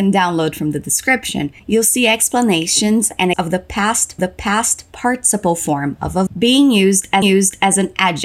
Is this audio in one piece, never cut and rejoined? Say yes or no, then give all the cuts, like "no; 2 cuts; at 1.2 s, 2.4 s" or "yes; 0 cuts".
no; 5 cuts; at 1.6 s, 3.3 s, 4.2 s, 6.3 s, 7.2 s